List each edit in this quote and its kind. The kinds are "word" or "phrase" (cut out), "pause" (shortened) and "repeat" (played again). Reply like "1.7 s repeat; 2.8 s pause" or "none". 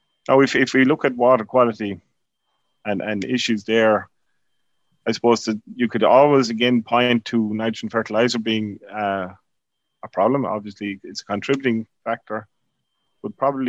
none